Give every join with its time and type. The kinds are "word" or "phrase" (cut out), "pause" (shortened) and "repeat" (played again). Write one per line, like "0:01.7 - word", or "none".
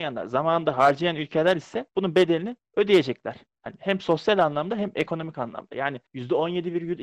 0:01.9 - pause
0:02.7 - pause
0:06.1 - pause